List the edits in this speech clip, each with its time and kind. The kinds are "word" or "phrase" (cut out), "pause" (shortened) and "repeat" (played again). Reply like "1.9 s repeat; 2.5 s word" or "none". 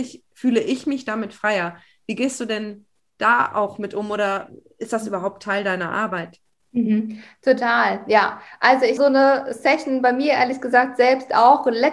9.0 s word